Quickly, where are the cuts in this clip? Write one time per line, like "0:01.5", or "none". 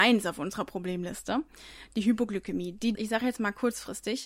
0:02.9